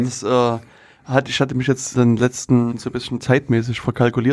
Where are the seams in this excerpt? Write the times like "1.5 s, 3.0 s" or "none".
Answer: 1.9 s, 2.7 s

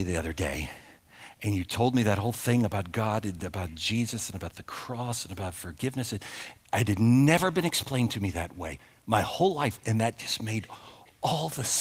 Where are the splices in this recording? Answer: none

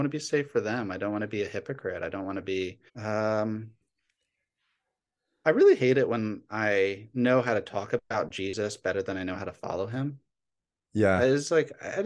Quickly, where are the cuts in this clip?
2.9 s

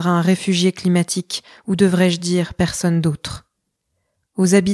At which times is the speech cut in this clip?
none

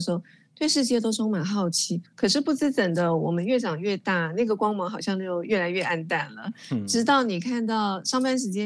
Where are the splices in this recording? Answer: 2.1 s

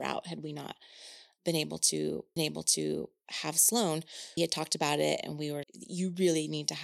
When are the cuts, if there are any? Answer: 2.4 s, 4.4 s, 5.2 s, 5.6 s

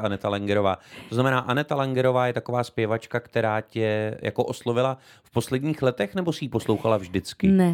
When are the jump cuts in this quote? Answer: none

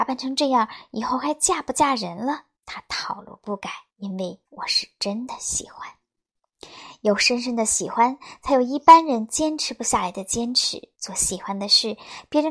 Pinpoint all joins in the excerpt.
2.6 s, 3.9 s, 4.5 s, 10.9 s

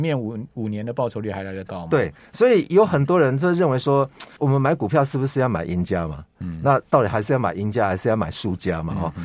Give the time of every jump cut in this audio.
4.4 s

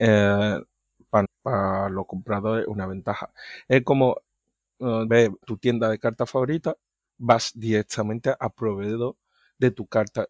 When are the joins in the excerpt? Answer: 1.2 s, 5.1 s, 5.4 s

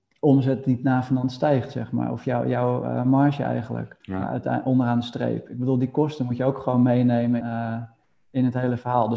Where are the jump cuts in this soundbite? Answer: 4.0 s, 7.4 s

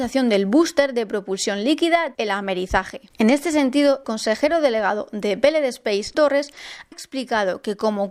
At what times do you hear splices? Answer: 2.1 s, 4.0 s, 6.1 s, 6.9 s

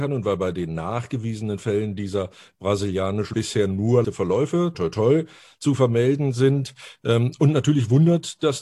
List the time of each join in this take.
3.3 s, 4.0 s, 4.7 s

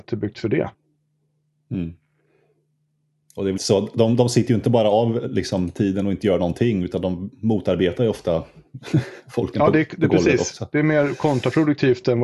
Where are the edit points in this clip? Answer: 3.5 s

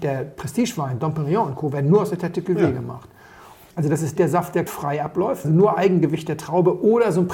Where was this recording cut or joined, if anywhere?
4.2 s, 4.7 s, 5.4 s

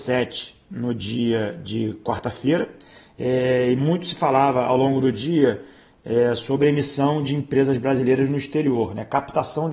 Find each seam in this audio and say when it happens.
none

